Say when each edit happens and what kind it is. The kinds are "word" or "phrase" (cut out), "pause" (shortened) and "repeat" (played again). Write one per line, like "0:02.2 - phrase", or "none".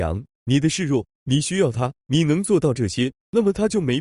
0:02.0 - pause